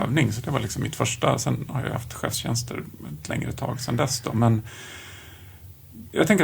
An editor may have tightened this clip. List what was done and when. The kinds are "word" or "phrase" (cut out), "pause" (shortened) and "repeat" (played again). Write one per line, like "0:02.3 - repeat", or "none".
none